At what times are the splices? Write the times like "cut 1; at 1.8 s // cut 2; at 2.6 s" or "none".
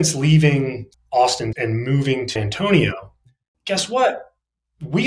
cut 1; at 0.9 s // cut 2; at 1.5 s // cut 3; at 2.4 s // cut 4; at 3.5 s